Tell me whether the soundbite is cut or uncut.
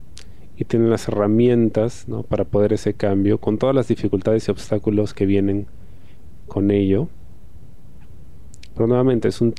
cut